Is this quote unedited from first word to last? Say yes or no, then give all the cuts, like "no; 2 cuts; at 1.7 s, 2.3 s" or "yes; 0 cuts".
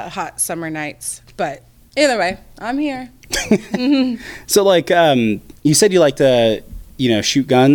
no; 1 cut; at 5.5 s